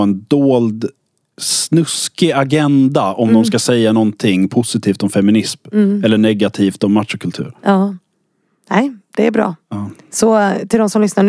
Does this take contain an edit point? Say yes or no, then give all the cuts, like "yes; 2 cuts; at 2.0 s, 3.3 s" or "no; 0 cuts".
no; 0 cuts